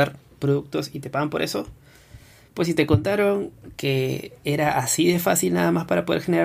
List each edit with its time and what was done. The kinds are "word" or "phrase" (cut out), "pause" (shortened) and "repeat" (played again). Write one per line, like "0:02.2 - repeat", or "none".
none